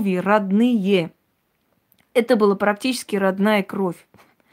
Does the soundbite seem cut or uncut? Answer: uncut